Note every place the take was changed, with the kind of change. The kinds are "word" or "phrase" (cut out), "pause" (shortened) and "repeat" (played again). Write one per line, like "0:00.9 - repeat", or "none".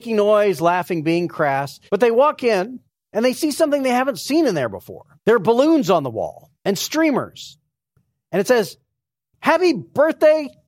0:01.9 - pause
0:02.9 - pause
0:05.2 - pause
0:06.6 - pause